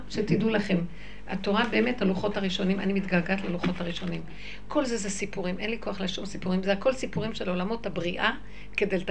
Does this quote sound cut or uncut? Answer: uncut